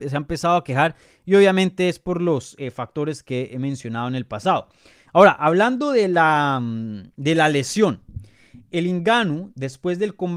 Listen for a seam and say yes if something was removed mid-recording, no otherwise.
no